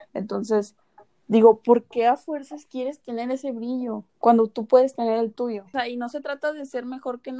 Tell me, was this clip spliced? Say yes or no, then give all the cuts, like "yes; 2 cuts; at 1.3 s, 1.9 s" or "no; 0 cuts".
yes; 1 cut; at 4.1 s